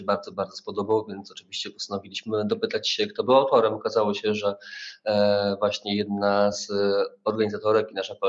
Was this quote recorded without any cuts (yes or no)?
yes